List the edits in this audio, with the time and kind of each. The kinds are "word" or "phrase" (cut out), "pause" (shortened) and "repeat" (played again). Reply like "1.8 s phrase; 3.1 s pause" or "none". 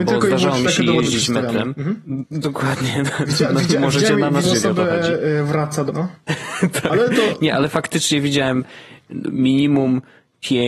4.4 s word; 5.9 s word